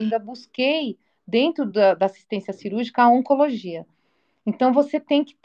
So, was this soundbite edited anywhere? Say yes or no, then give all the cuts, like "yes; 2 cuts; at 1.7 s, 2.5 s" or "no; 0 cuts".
no; 0 cuts